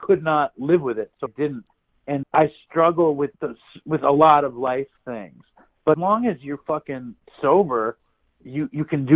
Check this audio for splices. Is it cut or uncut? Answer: cut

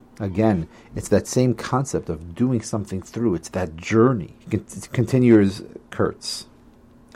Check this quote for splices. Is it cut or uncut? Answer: cut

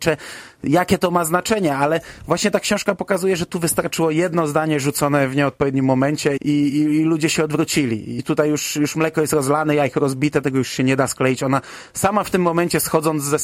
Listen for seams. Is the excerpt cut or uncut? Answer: cut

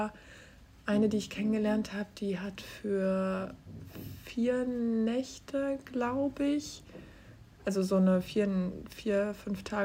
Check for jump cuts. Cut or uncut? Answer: uncut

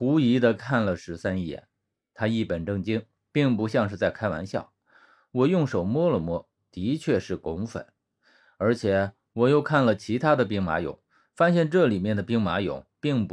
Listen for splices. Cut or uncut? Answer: uncut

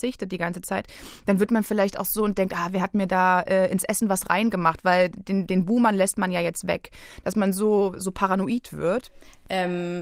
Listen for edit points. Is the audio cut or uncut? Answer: uncut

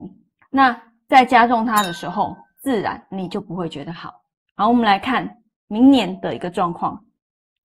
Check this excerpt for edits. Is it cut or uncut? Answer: uncut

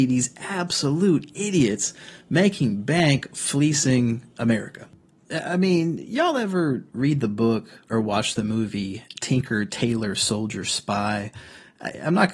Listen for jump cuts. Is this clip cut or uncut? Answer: uncut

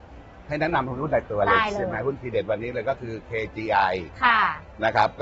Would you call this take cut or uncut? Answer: uncut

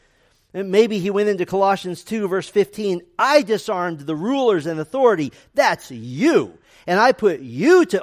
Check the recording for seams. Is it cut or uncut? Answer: uncut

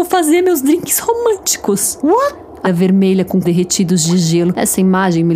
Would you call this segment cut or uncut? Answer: cut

